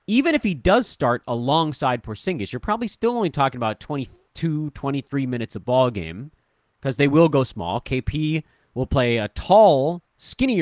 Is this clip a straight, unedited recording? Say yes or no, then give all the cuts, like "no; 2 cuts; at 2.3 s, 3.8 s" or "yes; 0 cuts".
yes; 0 cuts